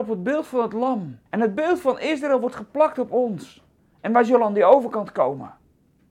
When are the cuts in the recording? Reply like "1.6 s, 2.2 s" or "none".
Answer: 1.3 s, 3.8 s